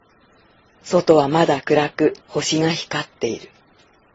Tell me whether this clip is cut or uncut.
cut